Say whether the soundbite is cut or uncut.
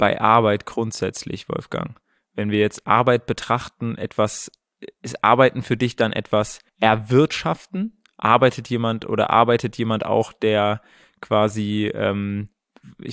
cut